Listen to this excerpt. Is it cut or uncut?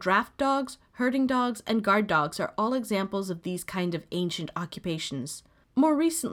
uncut